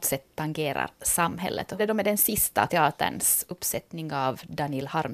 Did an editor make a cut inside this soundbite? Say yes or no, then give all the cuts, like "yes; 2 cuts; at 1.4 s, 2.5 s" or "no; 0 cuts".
yes; 2 cuts; at 1.8 s, 2.7 s